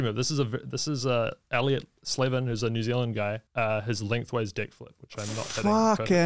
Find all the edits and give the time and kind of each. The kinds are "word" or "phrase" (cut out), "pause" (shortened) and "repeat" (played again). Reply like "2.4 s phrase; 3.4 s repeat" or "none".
3.5 s pause